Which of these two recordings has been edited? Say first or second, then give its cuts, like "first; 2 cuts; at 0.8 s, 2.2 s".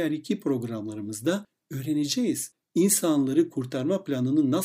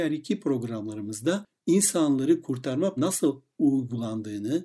second; 2 cuts; at 1.6 s, 3.0 s